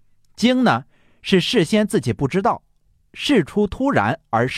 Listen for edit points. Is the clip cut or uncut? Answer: uncut